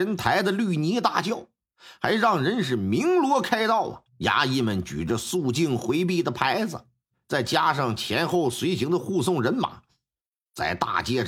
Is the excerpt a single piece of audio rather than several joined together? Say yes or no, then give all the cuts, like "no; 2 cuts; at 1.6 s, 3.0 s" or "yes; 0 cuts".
no; 1 cut; at 4.1 s